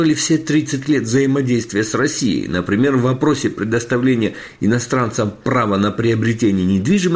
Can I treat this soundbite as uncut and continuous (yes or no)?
yes